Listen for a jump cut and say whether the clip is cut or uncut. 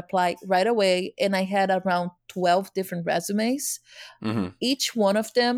uncut